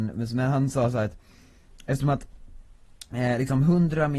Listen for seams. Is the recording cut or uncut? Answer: uncut